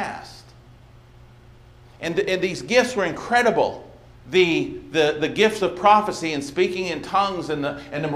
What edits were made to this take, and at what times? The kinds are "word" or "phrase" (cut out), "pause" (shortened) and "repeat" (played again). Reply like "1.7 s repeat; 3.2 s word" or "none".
4.1 s pause